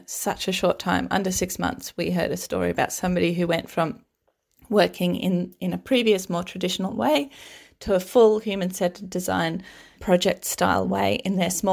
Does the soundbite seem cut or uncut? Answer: cut